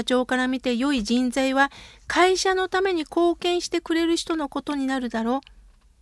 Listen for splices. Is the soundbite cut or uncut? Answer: uncut